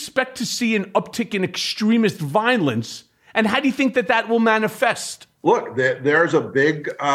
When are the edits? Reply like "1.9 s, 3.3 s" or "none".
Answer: 5.3 s